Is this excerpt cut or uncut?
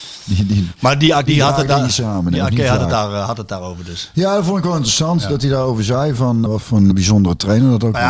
cut